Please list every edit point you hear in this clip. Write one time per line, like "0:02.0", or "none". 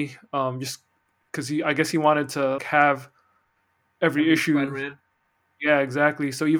0:02.6